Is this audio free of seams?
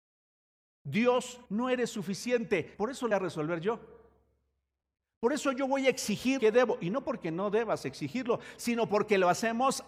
no; 4 cuts; at 1.5 s, 2.7 s, 3.1 s, 6.4 s

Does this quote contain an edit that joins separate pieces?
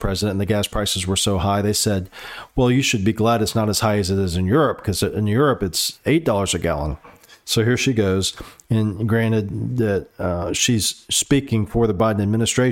no; 0 cuts

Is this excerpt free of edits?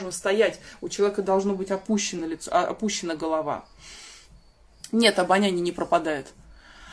yes; 0 cuts

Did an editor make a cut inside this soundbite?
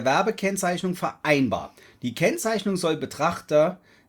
no; 0 cuts

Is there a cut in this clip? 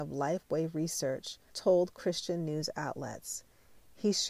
yes; 1 cut; at 1.5 s

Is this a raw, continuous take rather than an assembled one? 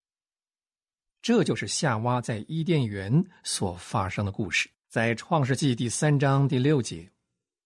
no; 1 cut; at 4.8 s

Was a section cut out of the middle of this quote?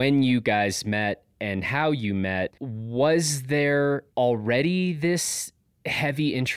yes; 2 cuts; at 2.6 s, 4.1 s

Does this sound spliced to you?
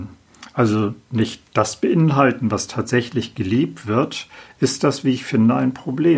no; 0 cuts

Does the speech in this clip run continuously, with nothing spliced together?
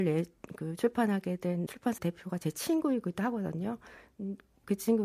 no; 2 cuts; at 1.7 s, 2.0 s

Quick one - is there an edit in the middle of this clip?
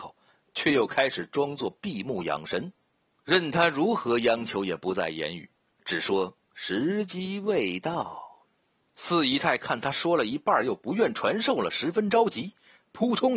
no; 0 cuts

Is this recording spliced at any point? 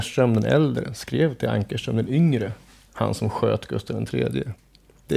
no; 0 cuts

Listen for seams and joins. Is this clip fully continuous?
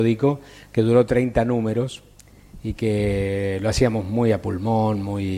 yes; 0 cuts

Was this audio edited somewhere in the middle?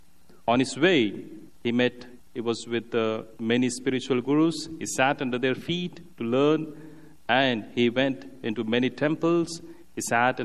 yes; 1 cut; at 1.5 s

